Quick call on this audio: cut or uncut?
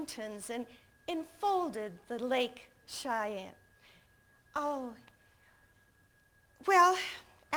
uncut